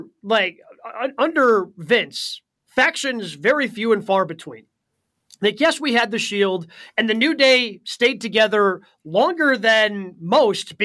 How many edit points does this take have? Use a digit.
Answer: 0